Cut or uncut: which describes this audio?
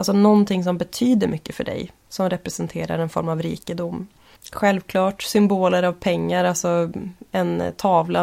uncut